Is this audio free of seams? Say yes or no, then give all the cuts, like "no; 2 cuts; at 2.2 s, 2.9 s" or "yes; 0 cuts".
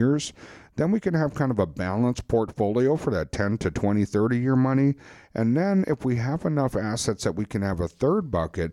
yes; 0 cuts